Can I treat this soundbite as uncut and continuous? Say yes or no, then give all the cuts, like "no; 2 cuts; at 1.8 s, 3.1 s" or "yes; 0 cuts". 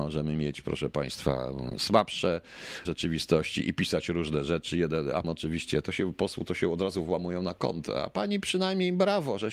no; 3 cuts; at 2.8 s, 5.2 s, 5.8 s